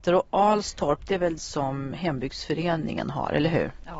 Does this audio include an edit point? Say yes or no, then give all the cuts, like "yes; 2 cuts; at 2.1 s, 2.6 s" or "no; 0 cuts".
yes; 1 cut; at 1.4 s